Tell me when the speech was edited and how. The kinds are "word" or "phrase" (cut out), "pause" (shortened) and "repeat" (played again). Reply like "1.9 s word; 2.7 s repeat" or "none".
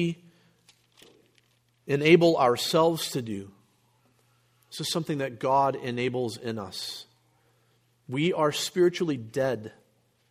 none